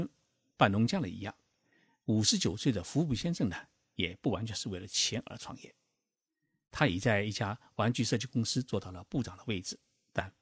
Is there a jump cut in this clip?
no; 0 cuts

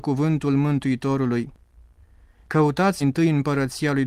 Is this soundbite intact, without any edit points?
no; 1 cut; at 3.0 s

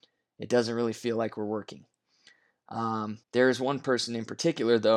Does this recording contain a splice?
yes; 1 cut; at 3.2 s

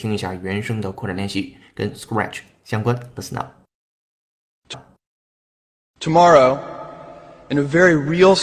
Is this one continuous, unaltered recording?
no; 1 cut; at 4.7 s

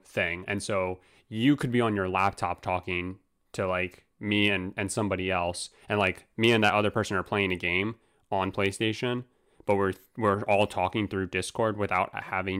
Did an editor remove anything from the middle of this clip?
no; 0 cuts

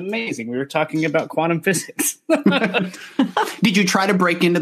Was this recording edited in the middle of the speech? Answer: no; 0 cuts

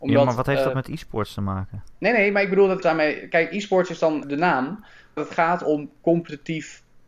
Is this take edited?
yes; 3 cuts; at 2.8 s, 4.2 s, 5.2 s

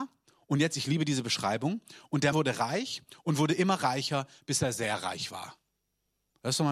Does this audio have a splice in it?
yes; 1 cut; at 2.3 s

